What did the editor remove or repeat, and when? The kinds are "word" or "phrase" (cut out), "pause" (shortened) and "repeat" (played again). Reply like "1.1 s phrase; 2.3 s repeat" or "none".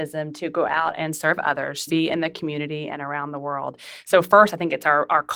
1.9 s word

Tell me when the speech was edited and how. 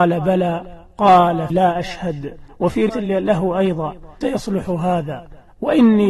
1.5 s word; 2.9 s word; 4.2 s word

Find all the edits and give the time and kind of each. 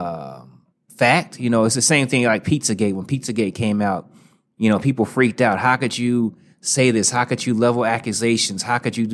none

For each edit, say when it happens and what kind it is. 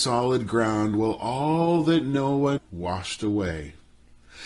2.6 s word

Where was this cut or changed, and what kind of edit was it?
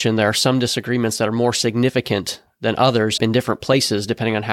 3.2 s phrase

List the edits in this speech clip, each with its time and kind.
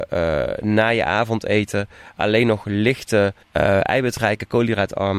3.4 s pause

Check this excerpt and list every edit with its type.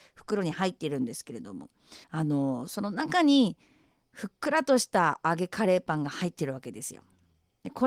2.0 s pause

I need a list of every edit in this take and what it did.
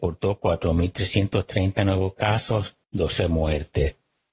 2.8 s pause

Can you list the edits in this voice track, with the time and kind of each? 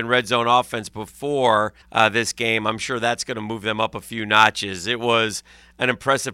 1.8 s pause

